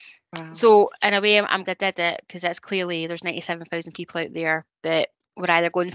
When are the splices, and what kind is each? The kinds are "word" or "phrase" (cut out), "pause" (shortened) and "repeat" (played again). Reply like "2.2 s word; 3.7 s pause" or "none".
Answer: 1.6 s word